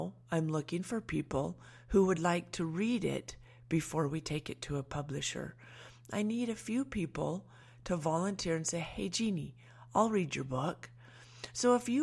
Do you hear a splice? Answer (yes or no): no